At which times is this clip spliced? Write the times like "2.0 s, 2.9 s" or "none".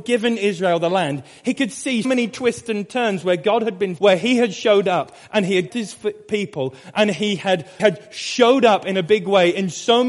2.0 s, 4.0 s, 5.7 s, 7.8 s